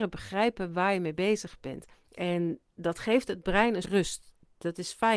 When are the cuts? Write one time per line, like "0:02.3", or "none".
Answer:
0:01.9
0:03.8